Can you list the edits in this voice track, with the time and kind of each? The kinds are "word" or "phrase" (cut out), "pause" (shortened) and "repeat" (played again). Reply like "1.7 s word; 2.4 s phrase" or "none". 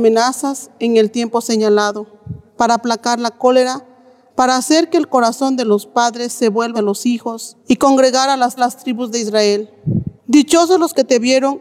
2.5 s pause; 4.3 s phrase; 6.7 s word; 7.6 s pause; 8.6 s repeat; 10.2 s pause